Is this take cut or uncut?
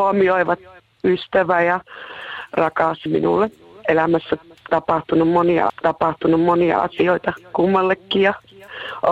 cut